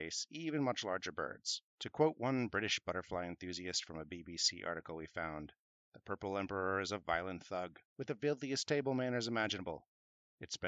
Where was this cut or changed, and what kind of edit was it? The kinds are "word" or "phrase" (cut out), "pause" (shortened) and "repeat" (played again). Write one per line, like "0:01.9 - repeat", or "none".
0:07.9 - pause